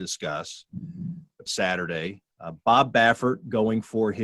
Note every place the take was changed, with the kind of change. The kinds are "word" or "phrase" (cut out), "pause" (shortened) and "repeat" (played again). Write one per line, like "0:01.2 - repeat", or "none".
0:01.5 - phrase
0:02.3 - pause